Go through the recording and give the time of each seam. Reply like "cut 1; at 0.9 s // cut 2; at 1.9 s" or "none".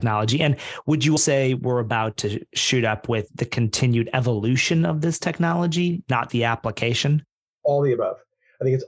cut 1; at 1.2 s // cut 2; at 3.3 s // cut 3; at 6.3 s